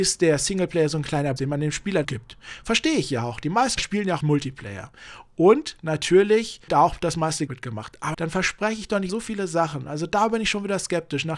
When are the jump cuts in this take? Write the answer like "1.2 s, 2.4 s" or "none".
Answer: 1.4 s, 2.0 s, 3.8 s, 4.2 s, 6.7 s, 7.5 s, 8.1 s, 9.1 s